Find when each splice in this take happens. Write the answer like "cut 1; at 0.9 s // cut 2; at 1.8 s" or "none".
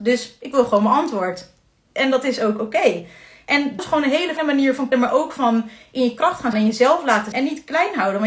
cut 1; at 3.8 s // cut 2; at 4.4 s // cut 3; at 4.9 s // cut 4; at 6.5 s // cut 5; at 7.3 s